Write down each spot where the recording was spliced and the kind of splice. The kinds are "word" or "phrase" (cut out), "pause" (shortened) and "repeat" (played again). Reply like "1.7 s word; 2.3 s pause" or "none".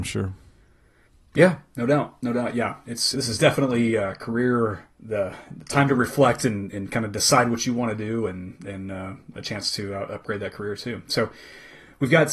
3.1 s word; 4.9 s pause